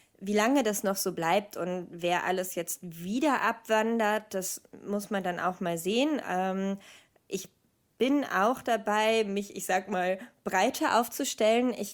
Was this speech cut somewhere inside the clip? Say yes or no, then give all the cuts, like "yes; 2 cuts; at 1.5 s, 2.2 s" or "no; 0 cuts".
no; 0 cuts